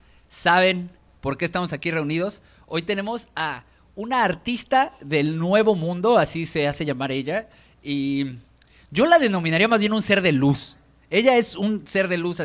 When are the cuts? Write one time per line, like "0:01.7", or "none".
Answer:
none